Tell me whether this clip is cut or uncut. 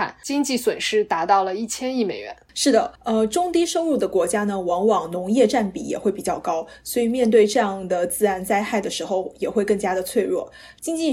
cut